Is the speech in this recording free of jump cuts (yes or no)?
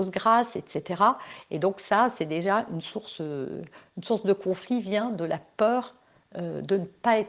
yes